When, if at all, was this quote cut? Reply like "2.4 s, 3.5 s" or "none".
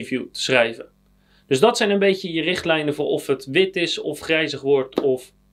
none